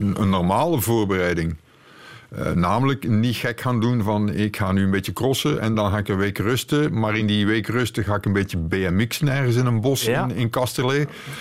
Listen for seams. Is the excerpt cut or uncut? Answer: uncut